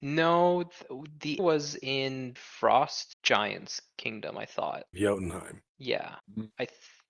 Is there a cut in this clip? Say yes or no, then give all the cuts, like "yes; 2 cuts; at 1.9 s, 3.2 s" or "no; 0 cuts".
yes; 4 cuts; at 1.4 s, 2.4 s, 4.9 s, 6.2 s